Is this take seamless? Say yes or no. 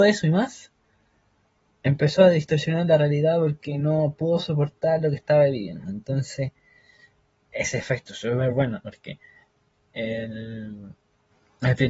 yes